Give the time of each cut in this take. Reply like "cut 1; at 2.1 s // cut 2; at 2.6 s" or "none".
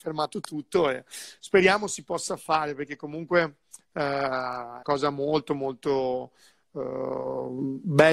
cut 1; at 4.8 s

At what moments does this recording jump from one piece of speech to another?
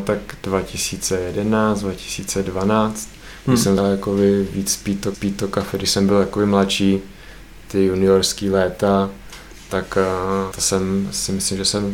cut 1; at 3.8 s // cut 2; at 5.1 s // cut 3; at 10.5 s

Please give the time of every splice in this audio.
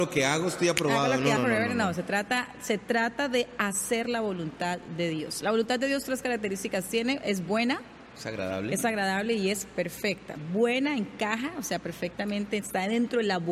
cut 1; at 1.4 s

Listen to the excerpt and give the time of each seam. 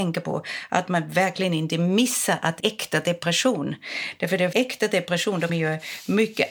cut 1; at 2.6 s // cut 2; at 4.5 s // cut 3; at 5.5 s

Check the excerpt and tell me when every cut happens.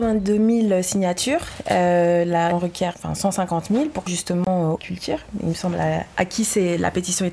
cut 1; at 2.5 s // cut 2; at 2.9 s // cut 3; at 4.1 s // cut 4; at 4.8 s

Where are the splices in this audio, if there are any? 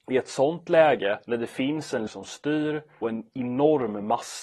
cut 1; at 1.2 s // cut 2; at 2.1 s // cut 3; at 3.0 s

